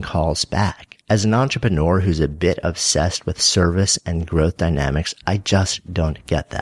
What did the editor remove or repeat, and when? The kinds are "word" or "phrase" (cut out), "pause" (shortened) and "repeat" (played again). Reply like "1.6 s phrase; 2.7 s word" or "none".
1.0 s pause